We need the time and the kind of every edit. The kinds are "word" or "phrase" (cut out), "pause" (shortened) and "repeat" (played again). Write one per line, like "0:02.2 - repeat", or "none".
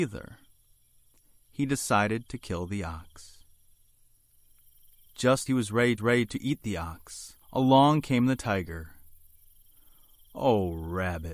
0:05.5 - word
0:06.0 - repeat
0:07.4 - pause